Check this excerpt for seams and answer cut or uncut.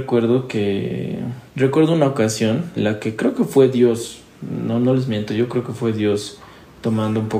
cut